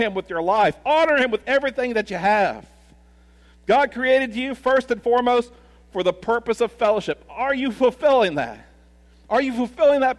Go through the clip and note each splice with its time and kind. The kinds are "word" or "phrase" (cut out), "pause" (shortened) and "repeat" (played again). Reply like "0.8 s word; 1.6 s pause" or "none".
none